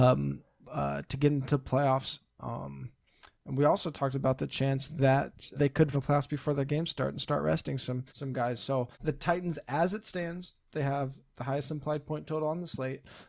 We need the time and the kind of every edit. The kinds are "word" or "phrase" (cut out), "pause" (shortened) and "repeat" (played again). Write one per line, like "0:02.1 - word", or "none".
0:05.5 - word
0:05.9 - phrase
0:08.1 - pause
0:08.9 - pause